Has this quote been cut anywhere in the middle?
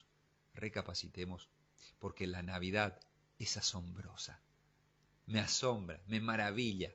no; 0 cuts

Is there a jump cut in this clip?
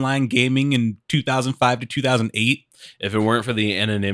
yes; 1 cut; at 1.0 s

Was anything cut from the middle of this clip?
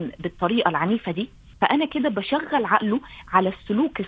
yes; 1 cut; at 1.5 s

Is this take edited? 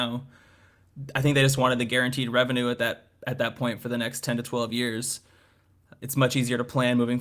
no; 0 cuts

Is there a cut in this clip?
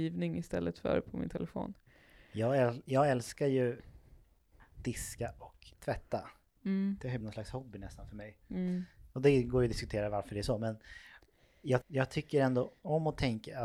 yes; 3 cuts; at 5.7 s, 7.2 s, 11.8 s

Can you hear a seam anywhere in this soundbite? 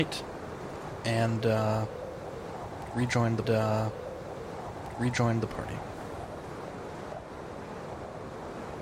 yes; 1 cut; at 3.4 s

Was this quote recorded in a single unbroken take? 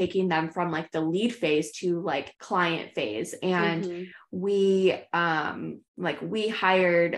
no; 2 cuts; at 2.3 s, 5.9 s

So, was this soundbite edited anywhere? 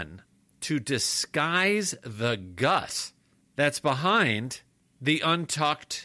no; 0 cuts

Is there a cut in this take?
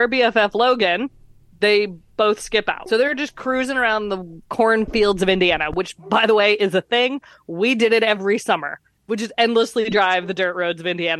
no; 0 cuts

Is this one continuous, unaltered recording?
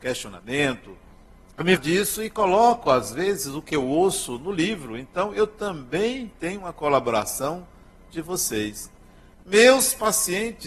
no; 2 cuts; at 1.1 s, 1.8 s

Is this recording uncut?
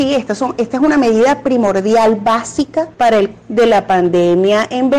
no; 2 cuts; at 2.9 s, 3.3 s

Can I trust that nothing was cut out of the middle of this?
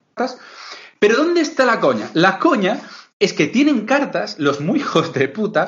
yes; 0 cuts

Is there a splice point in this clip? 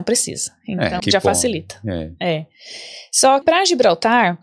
yes; 2 cuts; at 1.0 s, 3.4 s

